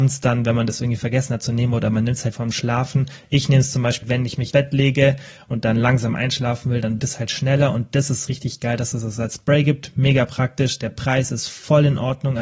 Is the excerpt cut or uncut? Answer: cut